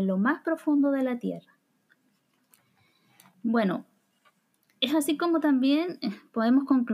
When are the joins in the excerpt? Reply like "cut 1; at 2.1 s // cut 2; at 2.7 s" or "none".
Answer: none